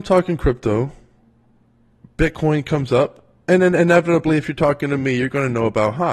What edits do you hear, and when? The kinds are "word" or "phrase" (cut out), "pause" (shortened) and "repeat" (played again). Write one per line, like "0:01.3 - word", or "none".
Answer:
none